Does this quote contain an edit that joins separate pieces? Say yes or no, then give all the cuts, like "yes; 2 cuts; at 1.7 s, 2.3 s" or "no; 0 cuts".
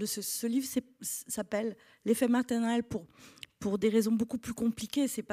no; 0 cuts